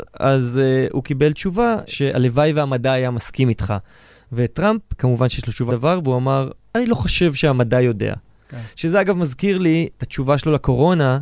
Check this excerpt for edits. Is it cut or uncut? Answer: cut